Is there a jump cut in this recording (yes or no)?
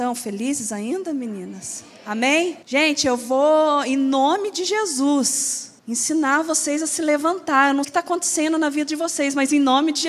yes